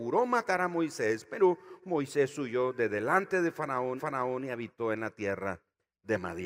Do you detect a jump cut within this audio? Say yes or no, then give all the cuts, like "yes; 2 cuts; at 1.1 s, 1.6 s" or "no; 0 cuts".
yes; 1 cut; at 4.0 s